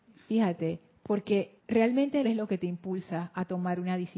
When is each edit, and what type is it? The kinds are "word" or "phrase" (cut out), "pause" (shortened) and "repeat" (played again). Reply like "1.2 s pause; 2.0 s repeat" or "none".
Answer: 1.6 s pause; 2.2 s word